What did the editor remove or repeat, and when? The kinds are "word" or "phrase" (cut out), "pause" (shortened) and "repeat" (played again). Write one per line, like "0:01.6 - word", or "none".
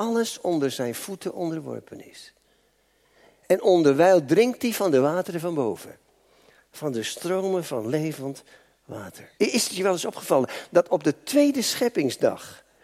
0:09.4 - pause